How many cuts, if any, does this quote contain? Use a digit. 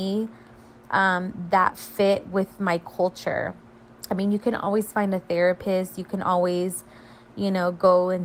0